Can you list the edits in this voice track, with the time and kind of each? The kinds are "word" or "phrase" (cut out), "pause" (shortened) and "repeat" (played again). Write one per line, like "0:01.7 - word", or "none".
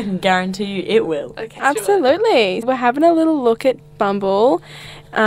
0:01.6 - word
0:02.6 - word
0:03.8 - word